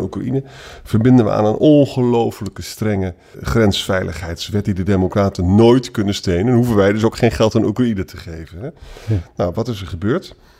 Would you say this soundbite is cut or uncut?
cut